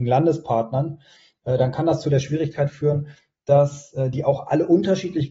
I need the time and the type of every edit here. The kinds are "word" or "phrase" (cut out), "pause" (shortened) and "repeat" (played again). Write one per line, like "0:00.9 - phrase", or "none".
none